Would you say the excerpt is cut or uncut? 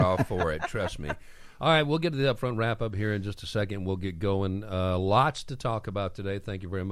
uncut